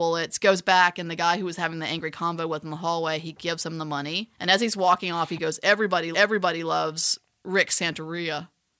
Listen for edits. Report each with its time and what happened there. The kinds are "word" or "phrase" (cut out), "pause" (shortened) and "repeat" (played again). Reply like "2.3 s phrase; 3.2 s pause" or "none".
4.3 s pause; 6.1 s repeat